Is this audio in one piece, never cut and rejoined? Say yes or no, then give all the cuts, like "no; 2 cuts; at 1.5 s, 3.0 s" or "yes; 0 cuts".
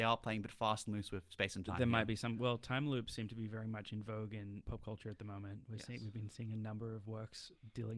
no; 1 cut; at 4.6 s